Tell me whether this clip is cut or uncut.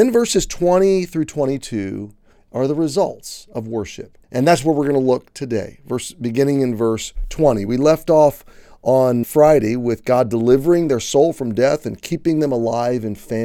cut